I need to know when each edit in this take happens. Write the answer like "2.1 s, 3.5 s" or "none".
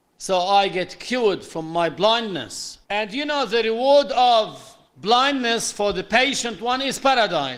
2.8 s, 4.9 s